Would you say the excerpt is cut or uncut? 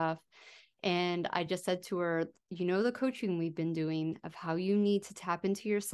uncut